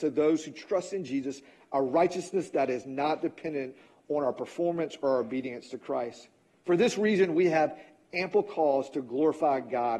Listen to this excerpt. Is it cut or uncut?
uncut